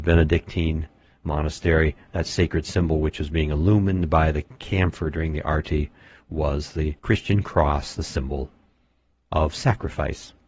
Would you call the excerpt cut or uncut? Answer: cut